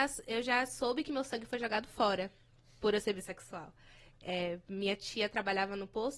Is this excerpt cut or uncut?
uncut